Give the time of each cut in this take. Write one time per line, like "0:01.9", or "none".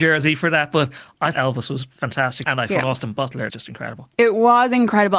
0:01.3
0:02.4
0:03.5